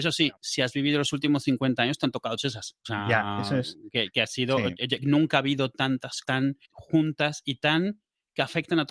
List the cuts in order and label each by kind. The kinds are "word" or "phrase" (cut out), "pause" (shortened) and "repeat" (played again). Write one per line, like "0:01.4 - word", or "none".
0:02.4 - word
0:02.8 - pause
0:06.2 - word
0:06.6 - pause